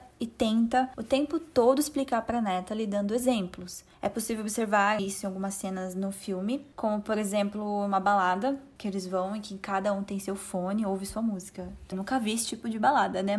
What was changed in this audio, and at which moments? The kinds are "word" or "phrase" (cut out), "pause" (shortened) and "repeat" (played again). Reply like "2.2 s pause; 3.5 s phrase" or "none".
5.0 s word; 11.9 s word